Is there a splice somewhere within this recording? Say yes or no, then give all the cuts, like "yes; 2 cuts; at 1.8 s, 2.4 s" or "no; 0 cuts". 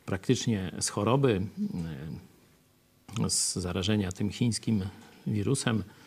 no; 0 cuts